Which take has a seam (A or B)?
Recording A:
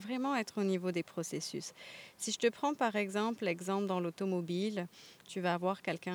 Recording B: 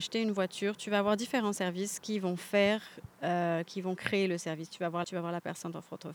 B